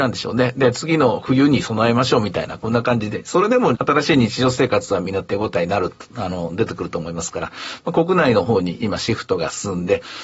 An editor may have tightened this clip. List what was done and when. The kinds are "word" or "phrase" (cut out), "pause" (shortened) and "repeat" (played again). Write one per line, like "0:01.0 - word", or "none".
0:03.7 - word